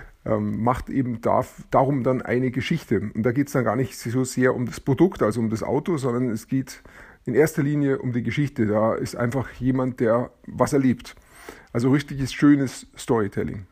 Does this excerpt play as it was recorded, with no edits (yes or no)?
yes